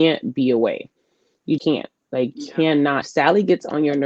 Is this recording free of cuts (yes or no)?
no